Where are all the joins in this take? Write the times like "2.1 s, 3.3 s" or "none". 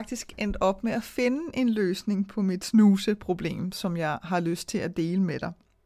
none